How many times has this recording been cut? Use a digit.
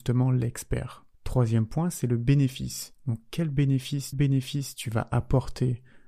3